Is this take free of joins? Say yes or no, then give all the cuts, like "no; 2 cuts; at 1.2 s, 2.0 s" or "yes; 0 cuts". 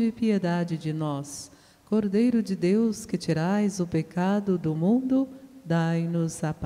yes; 0 cuts